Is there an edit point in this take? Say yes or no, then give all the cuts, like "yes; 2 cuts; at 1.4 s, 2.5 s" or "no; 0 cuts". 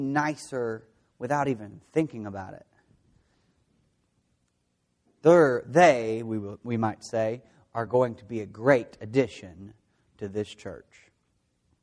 no; 0 cuts